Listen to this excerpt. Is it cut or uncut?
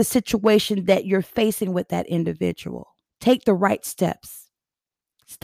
cut